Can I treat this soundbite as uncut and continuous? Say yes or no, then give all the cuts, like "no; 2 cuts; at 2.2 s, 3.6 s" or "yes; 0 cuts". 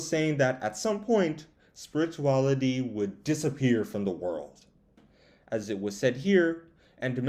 yes; 0 cuts